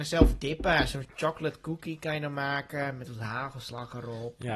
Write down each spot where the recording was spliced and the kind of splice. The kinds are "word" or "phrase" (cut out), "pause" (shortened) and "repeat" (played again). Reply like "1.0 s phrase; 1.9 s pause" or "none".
none